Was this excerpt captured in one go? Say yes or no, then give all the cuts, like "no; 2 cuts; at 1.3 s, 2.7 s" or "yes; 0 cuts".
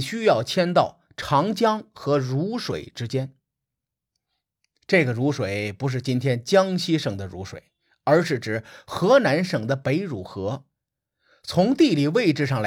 yes; 0 cuts